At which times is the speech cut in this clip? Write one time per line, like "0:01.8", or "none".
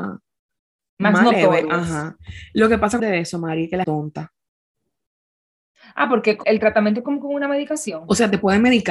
0:03.0
0:03.8
0:06.4